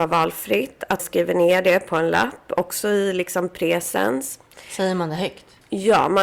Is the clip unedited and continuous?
no; 1 cut; at 1.0 s

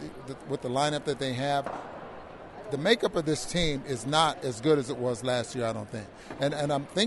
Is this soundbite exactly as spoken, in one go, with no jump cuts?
yes; 0 cuts

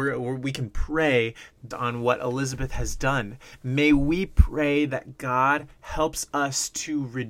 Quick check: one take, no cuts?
no; 1 cut; at 1.7 s

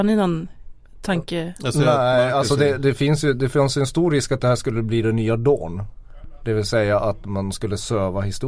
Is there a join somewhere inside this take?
no; 0 cuts

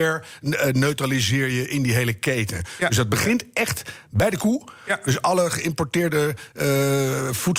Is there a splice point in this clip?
no; 0 cuts

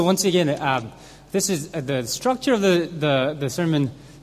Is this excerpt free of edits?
yes; 0 cuts

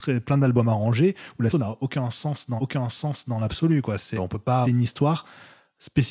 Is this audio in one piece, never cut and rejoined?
no; 4 cuts; at 1.5 s, 2.6 s, 4.2 s, 4.6 s

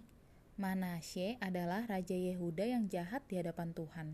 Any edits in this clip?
no; 0 cuts

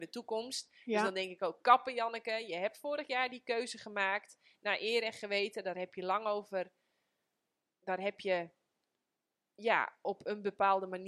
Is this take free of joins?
yes; 0 cuts

